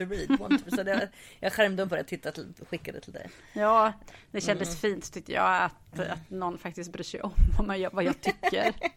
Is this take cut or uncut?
uncut